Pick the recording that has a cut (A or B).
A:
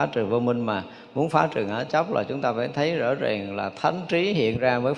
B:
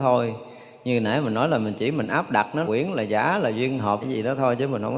B